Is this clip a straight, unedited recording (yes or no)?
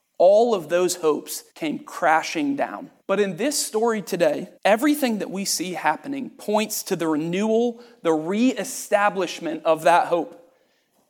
no